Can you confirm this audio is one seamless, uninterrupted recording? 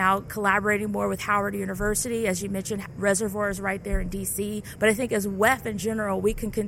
yes; 0 cuts

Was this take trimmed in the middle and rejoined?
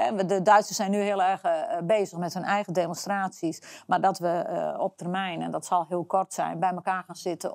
no; 0 cuts

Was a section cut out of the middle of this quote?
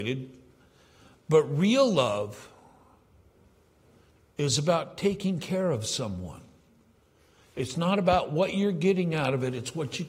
no; 0 cuts

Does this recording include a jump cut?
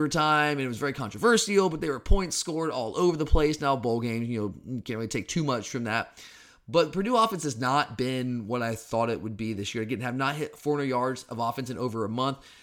no; 0 cuts

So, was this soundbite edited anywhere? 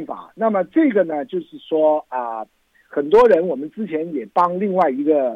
no; 0 cuts

